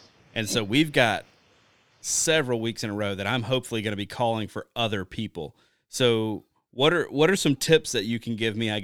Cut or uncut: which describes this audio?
uncut